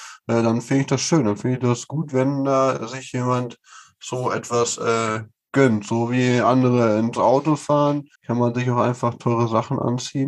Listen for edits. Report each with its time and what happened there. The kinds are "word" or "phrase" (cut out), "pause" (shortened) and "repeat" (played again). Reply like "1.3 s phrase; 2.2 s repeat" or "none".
7.2 s word; 8.1 s pause